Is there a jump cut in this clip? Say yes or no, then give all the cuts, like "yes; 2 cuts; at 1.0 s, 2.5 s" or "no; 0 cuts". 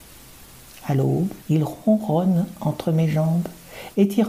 yes; 1 cut; at 1.4 s